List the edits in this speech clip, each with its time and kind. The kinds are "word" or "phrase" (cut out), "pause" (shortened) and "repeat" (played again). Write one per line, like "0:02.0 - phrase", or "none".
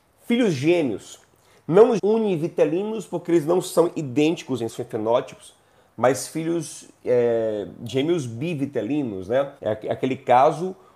0:02.0 - word
0:04.7 - word
0:09.6 - pause